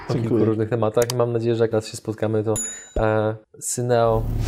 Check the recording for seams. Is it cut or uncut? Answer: cut